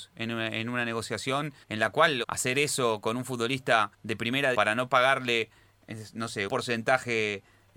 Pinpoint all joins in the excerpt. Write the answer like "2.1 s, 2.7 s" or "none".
1.6 s, 2.2 s, 3.9 s, 4.5 s, 6.5 s